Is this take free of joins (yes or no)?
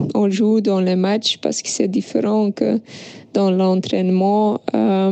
yes